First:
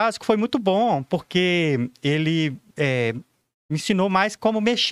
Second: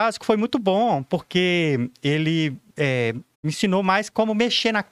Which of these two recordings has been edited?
second; 1 cut; at 3.3 s

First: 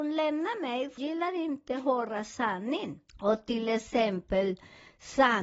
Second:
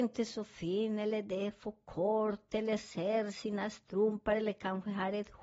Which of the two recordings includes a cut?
first; 2 cuts; at 1.0 s, 3.1 s

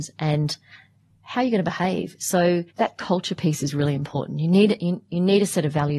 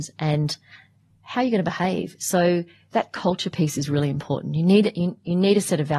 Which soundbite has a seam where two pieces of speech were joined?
first; 1 cut; at 2.7 s

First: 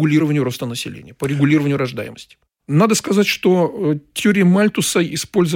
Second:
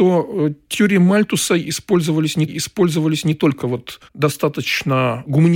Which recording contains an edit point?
second; 2 cuts; at 2.5 s, 4.1 s

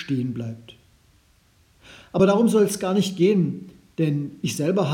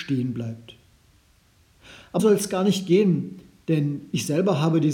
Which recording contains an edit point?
second; 1 cut; at 2.2 s

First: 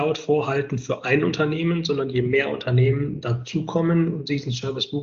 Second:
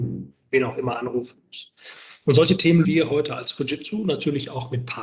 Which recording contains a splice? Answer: second; 1 cut; at 2.8 s

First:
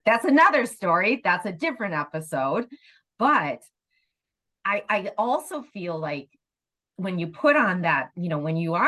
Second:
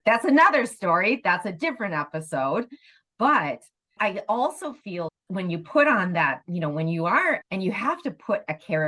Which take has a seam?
second; 3 cuts; at 4.0 s, 5.1 s, 7.4 s

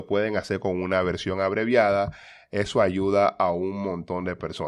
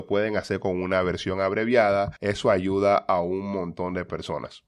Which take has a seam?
second; 1 cut; at 2.2 s

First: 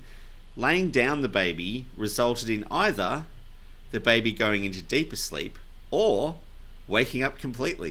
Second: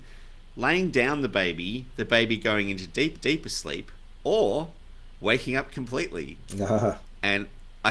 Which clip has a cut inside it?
second; 2 cuts; at 1.9 s, 3.1 s

